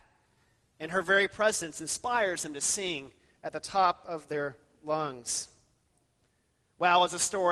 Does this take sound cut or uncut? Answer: uncut